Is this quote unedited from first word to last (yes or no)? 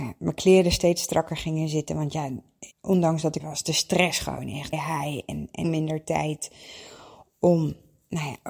no